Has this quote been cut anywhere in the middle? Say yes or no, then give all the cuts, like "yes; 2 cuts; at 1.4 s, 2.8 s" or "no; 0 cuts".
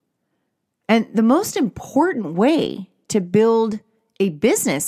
no; 0 cuts